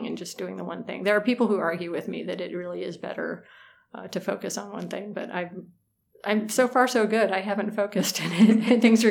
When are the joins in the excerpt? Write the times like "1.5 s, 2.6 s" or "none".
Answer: none